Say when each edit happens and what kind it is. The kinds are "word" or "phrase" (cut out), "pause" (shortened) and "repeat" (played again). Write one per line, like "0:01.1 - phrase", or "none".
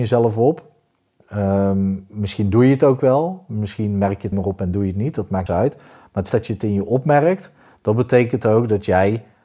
0:04.3 - word
0:05.5 - word
0:06.3 - word

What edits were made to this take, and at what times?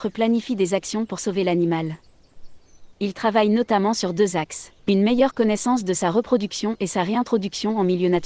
0:02.9 - pause
0:04.8 - pause

